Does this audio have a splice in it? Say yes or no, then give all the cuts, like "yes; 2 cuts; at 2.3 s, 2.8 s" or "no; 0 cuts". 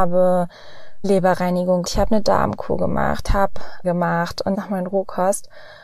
yes; 5 cuts; at 1.0 s, 1.8 s, 3.3 s, 3.8 s, 4.5 s